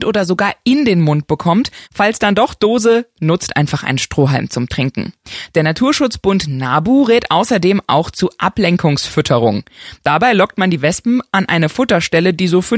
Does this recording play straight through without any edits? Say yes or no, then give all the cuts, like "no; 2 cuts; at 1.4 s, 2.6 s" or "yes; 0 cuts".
no; 1 cut; at 1.8 s